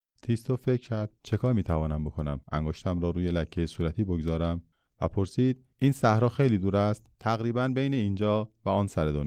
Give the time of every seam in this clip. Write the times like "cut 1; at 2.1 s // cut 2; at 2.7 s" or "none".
cut 1; at 1.2 s // cut 2; at 2.4 s // cut 3; at 4.7 s // cut 4; at 5.7 s // cut 5; at 7.1 s